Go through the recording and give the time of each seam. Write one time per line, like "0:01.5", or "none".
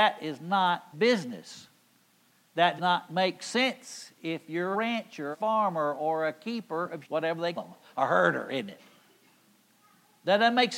0:00.9
0:02.8
0:04.7
0:05.3
0:07.0
0:07.6